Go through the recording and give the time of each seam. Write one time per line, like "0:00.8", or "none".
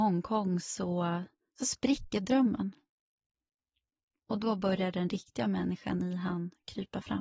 none